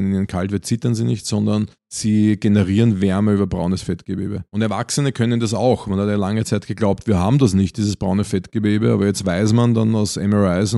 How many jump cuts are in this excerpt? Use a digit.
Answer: 2